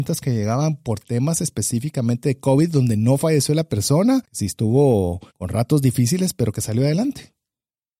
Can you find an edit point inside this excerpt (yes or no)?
yes